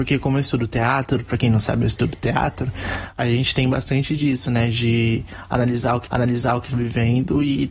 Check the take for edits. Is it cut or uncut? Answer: cut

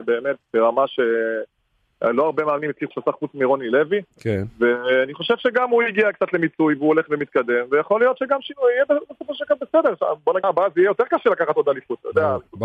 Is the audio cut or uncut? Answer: cut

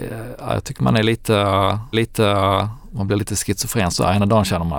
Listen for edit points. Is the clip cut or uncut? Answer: cut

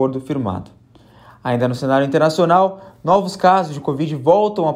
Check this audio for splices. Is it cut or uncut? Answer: uncut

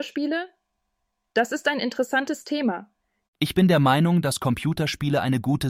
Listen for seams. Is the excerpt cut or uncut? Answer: uncut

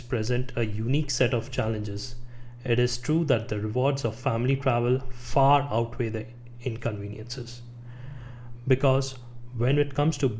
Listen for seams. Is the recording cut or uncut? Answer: uncut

